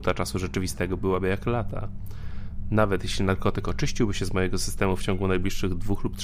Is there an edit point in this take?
no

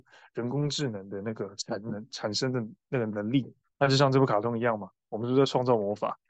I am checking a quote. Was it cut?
no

